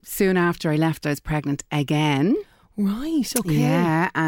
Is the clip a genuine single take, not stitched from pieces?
no; 1 cut; at 1.0 s

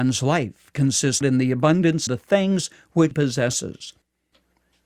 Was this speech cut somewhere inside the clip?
yes; 3 cuts; at 1.2 s, 2.1 s, 3.1 s

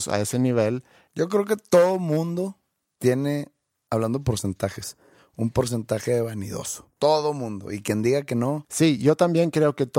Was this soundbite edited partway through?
no; 0 cuts

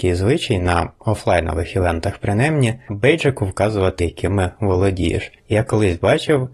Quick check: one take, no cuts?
no; 3 cuts; at 2.9 s, 4.0 s, 5.4 s

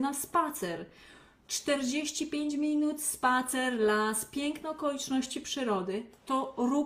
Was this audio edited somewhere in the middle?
no; 0 cuts

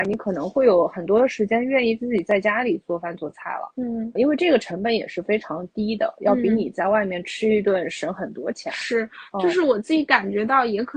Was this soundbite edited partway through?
yes; 1 cut; at 4.2 s

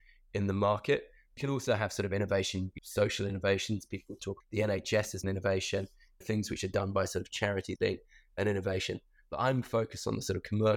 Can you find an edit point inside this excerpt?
yes; 7 cuts; at 1.4 s, 2.8 s, 4.4 s, 5.2 s, 6.2 s, 7.8 s, 9.6 s

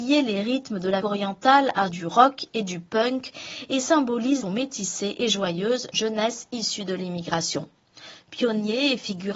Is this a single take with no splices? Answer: no; 4 cuts; at 1.0 s, 1.9 s, 4.4 s, 5.9 s

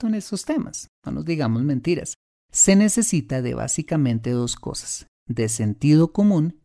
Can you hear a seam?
no; 0 cuts

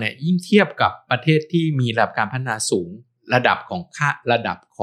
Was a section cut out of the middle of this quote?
no; 0 cuts

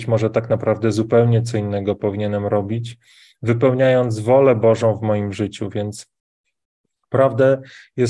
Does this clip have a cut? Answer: no; 0 cuts

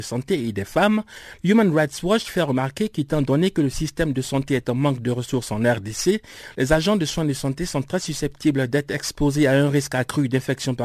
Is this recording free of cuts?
yes; 0 cuts

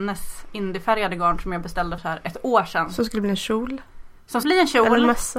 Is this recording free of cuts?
no; 2 cuts; at 2.0 s, 4.4 s

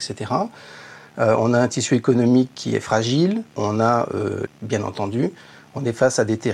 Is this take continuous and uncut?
no; 2 cuts; at 3.5 s, 4.5 s

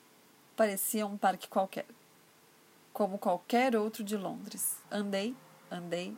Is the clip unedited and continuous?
no; 1 cut; at 4.8 s

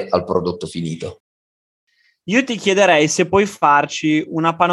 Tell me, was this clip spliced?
no; 0 cuts

